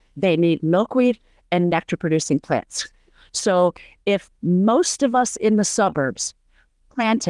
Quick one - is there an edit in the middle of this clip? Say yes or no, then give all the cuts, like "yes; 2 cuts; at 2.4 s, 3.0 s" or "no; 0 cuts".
no; 0 cuts